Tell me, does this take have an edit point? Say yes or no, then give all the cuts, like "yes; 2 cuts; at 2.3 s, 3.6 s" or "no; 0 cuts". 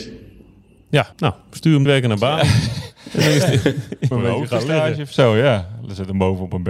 yes; 3 cuts; at 1.1 s, 1.9 s, 4.1 s